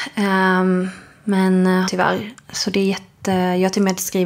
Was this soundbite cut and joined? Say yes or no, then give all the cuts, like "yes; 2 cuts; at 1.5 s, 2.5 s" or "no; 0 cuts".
yes; 1 cut; at 1.9 s